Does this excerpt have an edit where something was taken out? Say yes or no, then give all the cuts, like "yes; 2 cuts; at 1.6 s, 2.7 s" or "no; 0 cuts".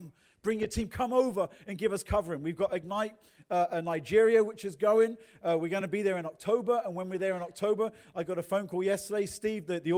no; 0 cuts